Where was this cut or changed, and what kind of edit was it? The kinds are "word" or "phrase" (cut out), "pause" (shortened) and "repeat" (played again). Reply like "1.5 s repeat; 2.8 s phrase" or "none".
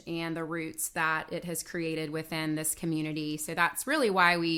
none